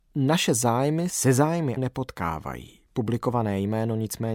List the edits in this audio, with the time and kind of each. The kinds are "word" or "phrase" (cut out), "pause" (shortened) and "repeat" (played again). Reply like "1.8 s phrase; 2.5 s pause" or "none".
1.1 s word; 1.8 s word; 2.9 s pause